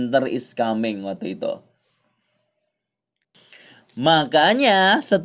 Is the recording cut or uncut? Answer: uncut